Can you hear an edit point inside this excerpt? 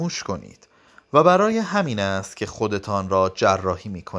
no; 0 cuts

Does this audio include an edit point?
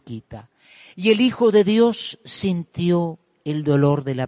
no; 0 cuts

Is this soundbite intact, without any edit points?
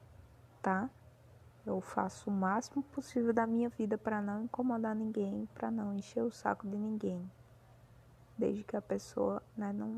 yes; 0 cuts

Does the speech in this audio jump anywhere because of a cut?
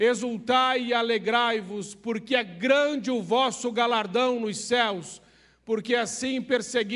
no; 0 cuts

